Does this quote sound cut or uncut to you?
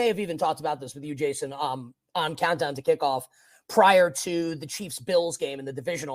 uncut